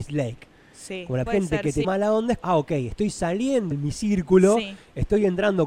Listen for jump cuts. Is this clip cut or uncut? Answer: cut